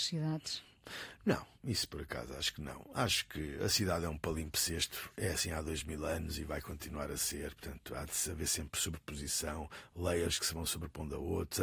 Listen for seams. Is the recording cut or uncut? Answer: uncut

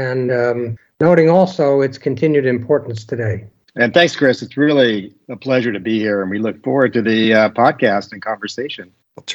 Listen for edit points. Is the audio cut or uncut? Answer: uncut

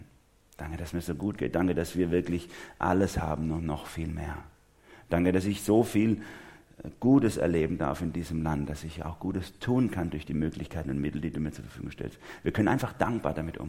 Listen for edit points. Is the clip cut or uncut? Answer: uncut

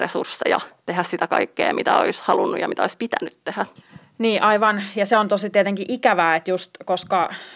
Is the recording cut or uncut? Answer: uncut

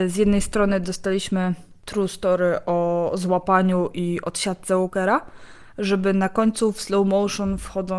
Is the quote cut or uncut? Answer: uncut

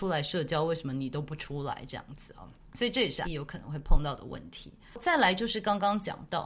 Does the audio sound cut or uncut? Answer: cut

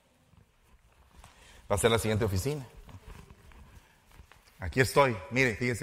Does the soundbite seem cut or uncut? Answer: uncut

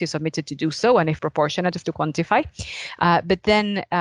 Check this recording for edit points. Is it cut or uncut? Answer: cut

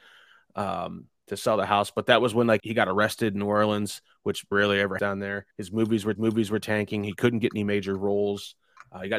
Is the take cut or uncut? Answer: cut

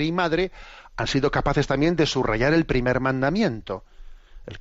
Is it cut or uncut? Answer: uncut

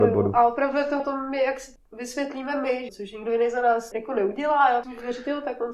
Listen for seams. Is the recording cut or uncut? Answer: cut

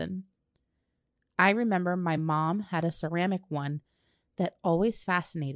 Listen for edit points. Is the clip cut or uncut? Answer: uncut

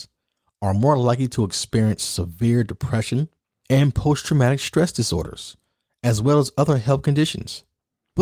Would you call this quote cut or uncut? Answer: uncut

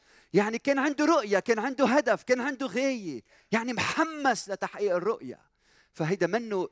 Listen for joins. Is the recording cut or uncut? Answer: uncut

